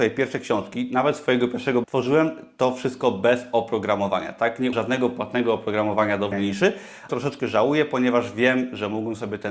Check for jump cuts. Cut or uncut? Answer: cut